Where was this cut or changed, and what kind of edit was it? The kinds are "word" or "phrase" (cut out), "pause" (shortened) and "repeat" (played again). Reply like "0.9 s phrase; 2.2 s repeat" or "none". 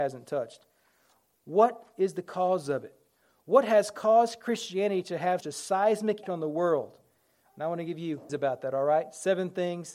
5.4 s word; 6.2 s word; 8.3 s phrase